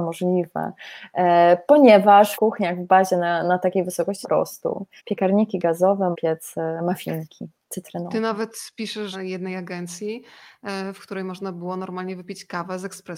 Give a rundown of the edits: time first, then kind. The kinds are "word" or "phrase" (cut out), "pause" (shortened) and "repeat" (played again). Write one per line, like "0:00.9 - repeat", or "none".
0:02.3 - phrase
0:03.4 - word
0:04.2 - phrase
0:05.0 - pause
0:06.1 - word
0:09.1 - phrase